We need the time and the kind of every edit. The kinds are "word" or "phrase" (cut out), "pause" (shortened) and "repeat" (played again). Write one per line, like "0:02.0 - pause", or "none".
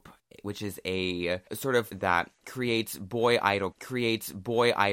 0:01.5 - pause
0:01.9 - word
0:03.7 - repeat